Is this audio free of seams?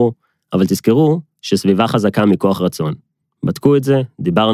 yes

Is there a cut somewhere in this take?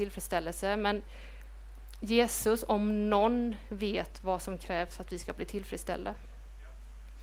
no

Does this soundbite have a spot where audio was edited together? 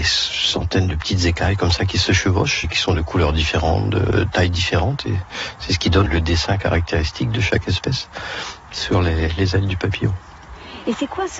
yes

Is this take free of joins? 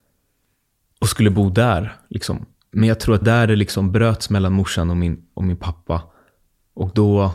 no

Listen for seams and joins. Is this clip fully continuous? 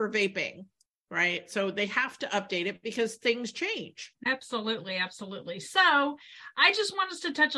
yes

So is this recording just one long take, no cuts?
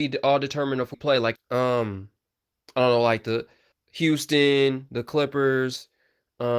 no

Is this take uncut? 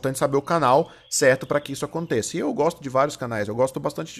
yes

